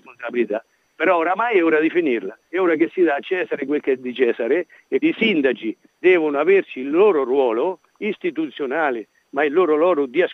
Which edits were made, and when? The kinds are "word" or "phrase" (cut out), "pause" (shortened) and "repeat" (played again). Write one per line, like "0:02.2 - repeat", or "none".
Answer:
0:02.5 - pause
0:05.0 - word